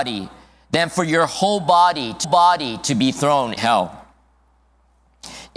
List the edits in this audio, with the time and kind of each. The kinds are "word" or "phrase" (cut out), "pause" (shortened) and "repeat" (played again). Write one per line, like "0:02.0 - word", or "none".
0:02.2 - repeat
0:03.6 - word